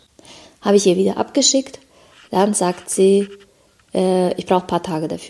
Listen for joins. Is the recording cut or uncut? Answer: uncut